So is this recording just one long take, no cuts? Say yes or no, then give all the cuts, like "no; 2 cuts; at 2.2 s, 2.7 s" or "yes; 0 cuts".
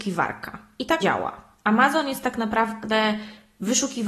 no; 1 cut; at 1.0 s